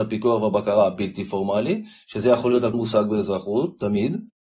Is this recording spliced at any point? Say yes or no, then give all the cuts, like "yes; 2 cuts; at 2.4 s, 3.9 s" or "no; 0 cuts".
yes; 1 cut; at 2.7 s